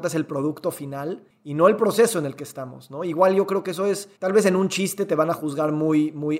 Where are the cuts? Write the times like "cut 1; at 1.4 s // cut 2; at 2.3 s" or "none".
cut 1; at 4.2 s